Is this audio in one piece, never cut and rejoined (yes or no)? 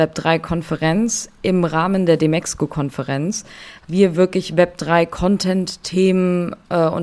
no